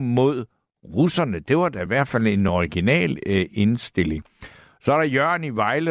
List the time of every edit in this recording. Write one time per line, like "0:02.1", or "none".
none